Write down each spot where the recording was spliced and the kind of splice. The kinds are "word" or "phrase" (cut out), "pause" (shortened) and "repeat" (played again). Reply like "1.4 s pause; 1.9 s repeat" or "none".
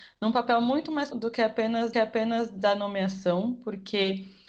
1.1 s word; 1.9 s repeat